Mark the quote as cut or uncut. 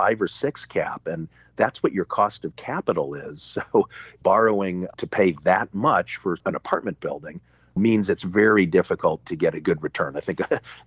uncut